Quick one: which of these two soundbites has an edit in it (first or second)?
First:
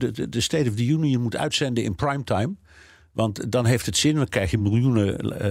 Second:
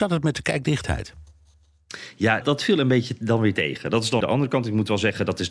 second